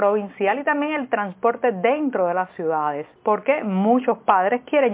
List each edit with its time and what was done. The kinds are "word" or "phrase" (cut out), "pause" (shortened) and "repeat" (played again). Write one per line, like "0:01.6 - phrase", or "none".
0:03.2 - pause